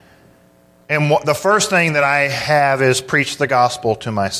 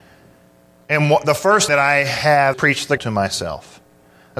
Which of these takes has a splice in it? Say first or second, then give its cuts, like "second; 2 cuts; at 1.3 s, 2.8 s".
second; 3 cuts; at 1.7 s, 2.5 s, 3.0 s